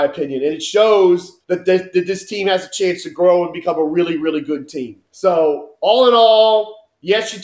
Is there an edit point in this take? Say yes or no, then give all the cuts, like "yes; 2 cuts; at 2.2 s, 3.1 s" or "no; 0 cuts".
yes; 2 cuts; at 1.4 s, 5.1 s